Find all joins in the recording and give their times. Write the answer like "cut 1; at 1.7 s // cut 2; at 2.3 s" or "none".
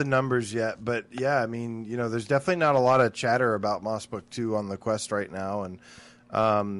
none